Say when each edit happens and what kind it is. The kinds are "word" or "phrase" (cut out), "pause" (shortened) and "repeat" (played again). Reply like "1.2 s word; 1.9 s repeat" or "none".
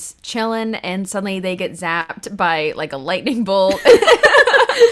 none